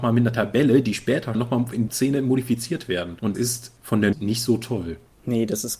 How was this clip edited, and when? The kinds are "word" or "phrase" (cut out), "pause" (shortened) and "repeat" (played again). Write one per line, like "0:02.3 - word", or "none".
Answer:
0:01.3 - phrase
0:01.9 - word
0:03.3 - word
0:04.1 - word

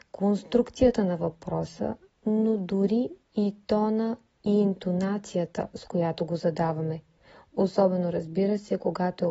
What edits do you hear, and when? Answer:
none

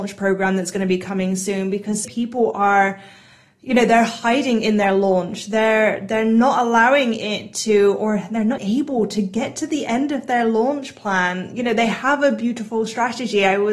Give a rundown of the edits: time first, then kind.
0:02.0 - word
0:08.6 - word

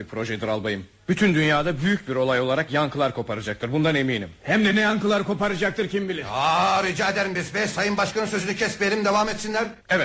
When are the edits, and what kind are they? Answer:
none

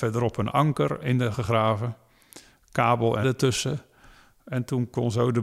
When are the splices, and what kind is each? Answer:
0:01.0 - word
0:01.3 - word
0:03.2 - word

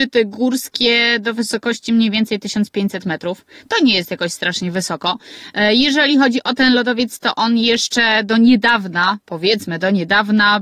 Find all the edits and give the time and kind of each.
none

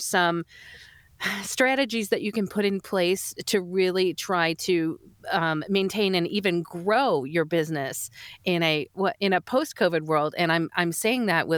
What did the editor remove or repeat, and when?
none

